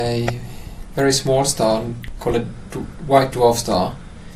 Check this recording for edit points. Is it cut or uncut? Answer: uncut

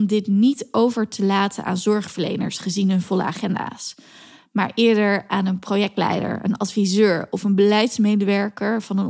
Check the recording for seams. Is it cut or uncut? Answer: uncut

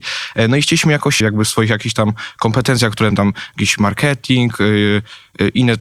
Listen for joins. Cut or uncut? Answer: cut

